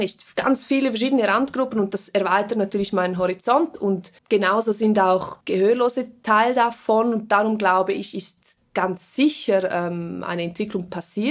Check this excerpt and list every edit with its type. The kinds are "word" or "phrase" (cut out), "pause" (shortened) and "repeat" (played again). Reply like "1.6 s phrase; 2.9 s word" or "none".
4.2 s pause; 5.4 s pause

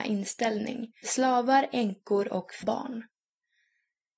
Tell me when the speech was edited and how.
1.0 s word; 2.6 s word

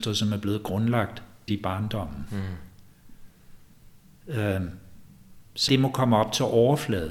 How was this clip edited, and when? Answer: 1.5 s word; 5.7 s word

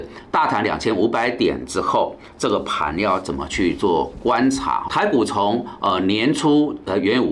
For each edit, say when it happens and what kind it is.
4.9 s word

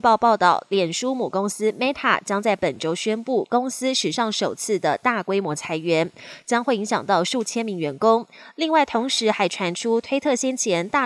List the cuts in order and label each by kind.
none

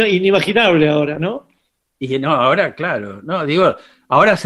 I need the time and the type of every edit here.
none

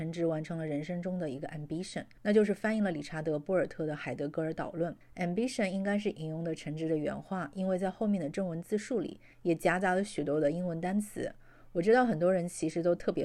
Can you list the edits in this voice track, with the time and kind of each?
none

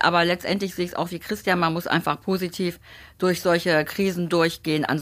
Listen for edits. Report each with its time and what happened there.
none

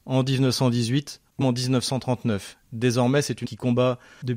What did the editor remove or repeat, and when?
1.4 s word; 3.4 s word

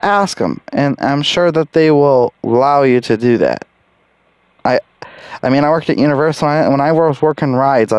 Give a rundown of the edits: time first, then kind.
none

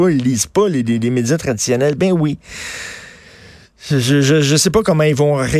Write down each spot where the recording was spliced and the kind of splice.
none

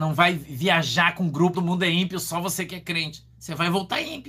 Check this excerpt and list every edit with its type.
1.5 s phrase

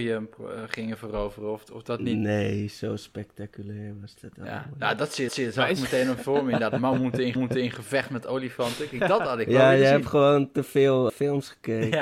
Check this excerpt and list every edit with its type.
5.3 s repeat; 7.3 s repeat; 11.1 s word

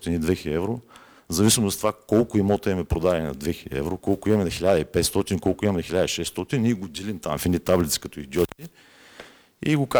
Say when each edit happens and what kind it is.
none

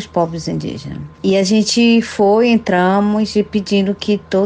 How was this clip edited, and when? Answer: 1.1 s pause

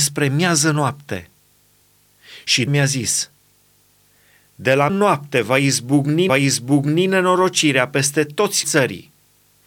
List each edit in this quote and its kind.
2.7 s word; 4.9 s word; 6.3 s repeat; 8.6 s word

